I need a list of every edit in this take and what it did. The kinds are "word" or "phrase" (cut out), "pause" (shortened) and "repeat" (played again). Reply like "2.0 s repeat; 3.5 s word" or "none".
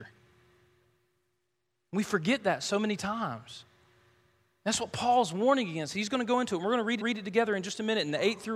7.0 s repeat